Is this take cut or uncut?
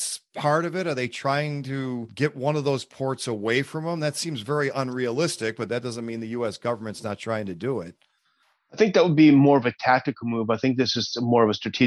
uncut